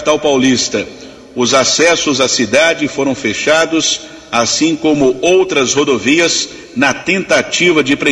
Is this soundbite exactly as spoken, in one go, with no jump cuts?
yes; 0 cuts

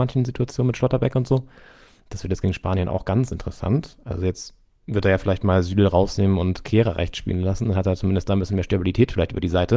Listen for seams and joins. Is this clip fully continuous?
yes; 0 cuts

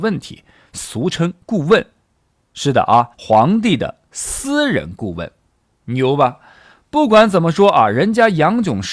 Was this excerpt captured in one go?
no; 2 cuts; at 1.4 s, 3.1 s

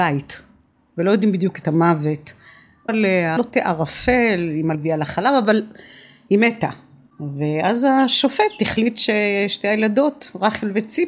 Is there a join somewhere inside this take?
yes; 4 cuts; at 1.6 s, 2.9 s, 3.4 s, 4.7 s

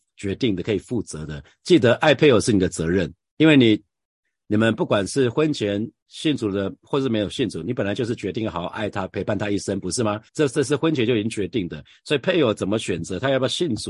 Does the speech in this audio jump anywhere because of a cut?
yes; 2 cuts; at 6.0 s, 10.3 s

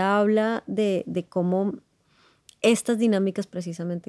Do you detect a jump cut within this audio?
no; 0 cuts

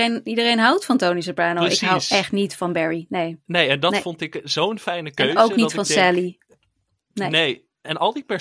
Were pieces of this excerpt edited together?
no; 0 cuts

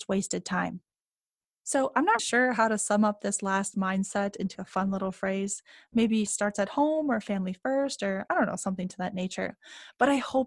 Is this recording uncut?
no; 3 cuts; at 2.2 s, 4.5 s, 6.3 s

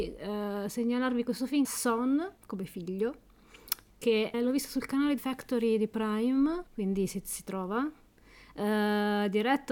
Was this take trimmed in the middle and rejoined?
yes; 5 cuts; at 1.6 s, 2.4 s, 4.3 s, 5.2 s, 6.7 s

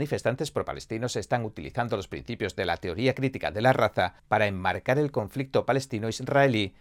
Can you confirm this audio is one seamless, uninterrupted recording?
no; 1 cut; at 4.2 s

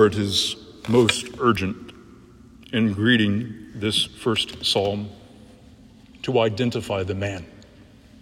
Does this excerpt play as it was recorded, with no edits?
yes; 0 cuts

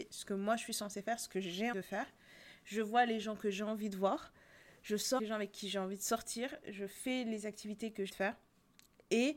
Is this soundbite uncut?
no; 3 cuts; at 1.7 s, 5.2 s, 8.1 s

